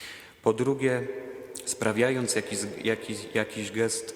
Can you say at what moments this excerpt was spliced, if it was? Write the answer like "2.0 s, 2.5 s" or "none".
none